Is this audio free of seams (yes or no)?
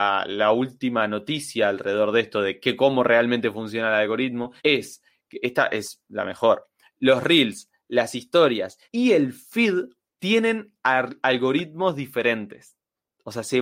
no